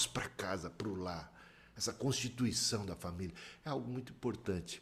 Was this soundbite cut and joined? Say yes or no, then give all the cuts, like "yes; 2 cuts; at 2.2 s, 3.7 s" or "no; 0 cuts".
no; 0 cuts